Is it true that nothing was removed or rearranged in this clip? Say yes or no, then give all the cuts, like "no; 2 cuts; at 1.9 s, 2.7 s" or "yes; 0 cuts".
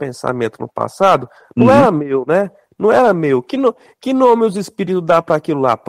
yes; 0 cuts